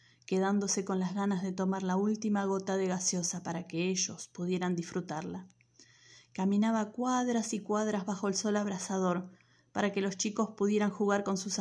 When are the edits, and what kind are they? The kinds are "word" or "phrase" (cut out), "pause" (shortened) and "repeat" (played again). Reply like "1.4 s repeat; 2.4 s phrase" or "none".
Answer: none

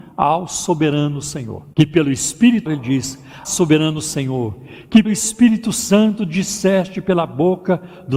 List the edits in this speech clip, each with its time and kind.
1.7 s pause; 2.7 s phrase; 3.4 s word; 5.0 s word

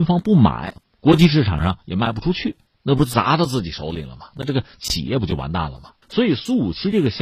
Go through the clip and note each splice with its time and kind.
6.0 s pause

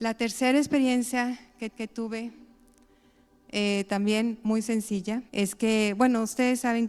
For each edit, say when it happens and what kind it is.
1.7 s repeat; 5.3 s pause

